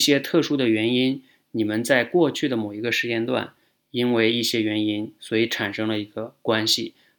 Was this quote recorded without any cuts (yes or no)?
yes